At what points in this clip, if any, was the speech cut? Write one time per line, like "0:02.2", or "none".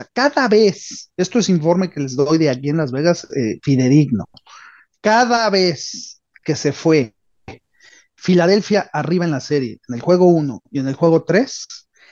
none